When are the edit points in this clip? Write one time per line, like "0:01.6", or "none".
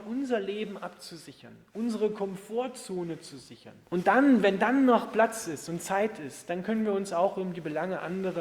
0:03.8